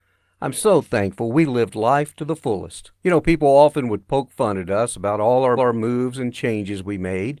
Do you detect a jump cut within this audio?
yes; 2 cuts; at 3.0 s, 5.6 s

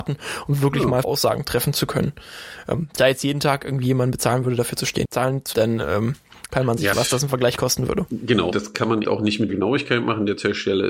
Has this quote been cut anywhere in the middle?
yes; 8 cuts; at 1.0 s, 3.0 s, 5.0 s, 5.5 s, 6.9 s, 8.5 s, 9.0 s, 9.5 s

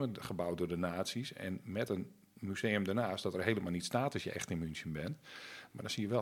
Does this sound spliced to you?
no; 0 cuts

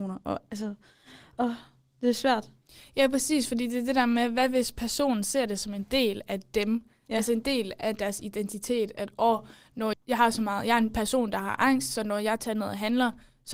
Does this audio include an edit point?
yes; 1 cut; at 9.9 s

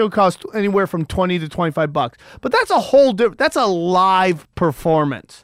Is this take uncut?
yes; 0 cuts

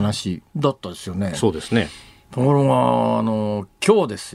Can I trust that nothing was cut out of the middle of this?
yes; 0 cuts

